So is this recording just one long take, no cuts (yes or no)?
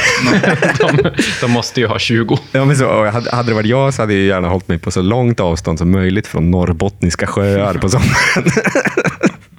yes